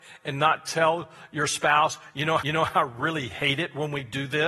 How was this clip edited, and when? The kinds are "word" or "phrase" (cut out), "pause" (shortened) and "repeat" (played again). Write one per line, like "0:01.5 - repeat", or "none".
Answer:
0:02.4 - repeat